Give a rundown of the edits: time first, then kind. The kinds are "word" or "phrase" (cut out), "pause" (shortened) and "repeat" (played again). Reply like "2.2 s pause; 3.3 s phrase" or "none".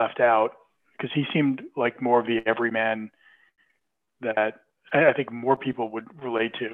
none

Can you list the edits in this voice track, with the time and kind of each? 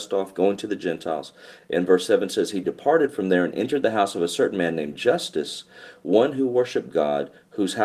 none

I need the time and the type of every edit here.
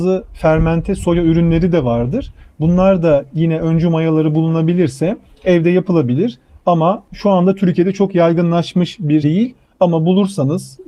9.2 s word

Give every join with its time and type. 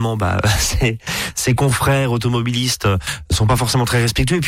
none

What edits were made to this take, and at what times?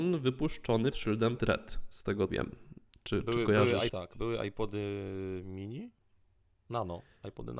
0.9 s word; 1.4 s word; 2.3 s word; 3.9 s word

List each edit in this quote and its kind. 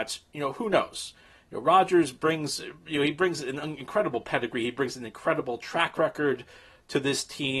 none

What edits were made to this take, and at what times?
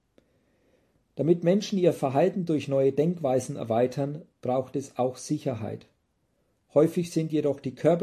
none

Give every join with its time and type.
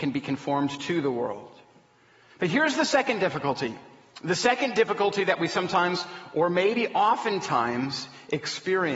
none

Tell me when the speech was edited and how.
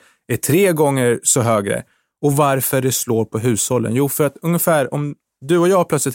none

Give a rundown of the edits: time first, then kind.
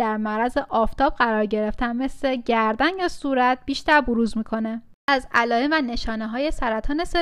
none

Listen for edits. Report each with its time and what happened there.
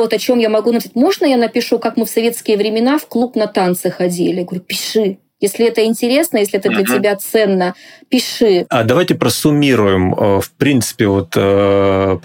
none

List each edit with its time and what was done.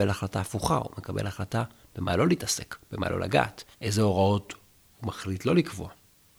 3.7 s pause

